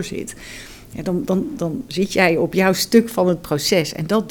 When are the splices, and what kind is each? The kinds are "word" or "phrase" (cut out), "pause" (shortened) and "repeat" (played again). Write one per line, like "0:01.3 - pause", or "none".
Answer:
none